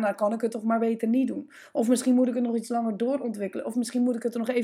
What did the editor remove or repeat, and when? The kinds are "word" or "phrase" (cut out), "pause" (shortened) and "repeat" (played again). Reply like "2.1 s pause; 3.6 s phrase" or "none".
none